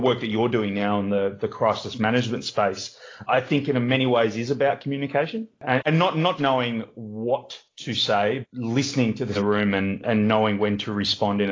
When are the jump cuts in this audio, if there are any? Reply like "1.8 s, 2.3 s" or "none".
3.3 s, 6.4 s, 8.4 s, 9.3 s

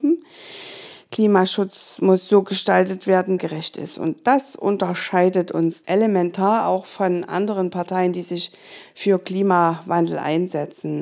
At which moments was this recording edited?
3.4 s, 5.8 s

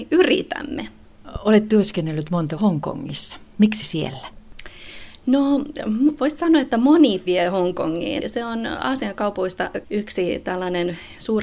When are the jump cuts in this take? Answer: 2.6 s, 3.8 s, 7.3 s, 8.2 s, 9.8 s

